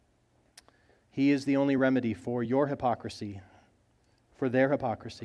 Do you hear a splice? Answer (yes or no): no